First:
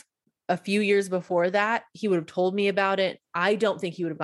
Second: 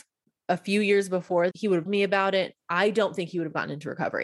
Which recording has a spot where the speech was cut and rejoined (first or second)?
second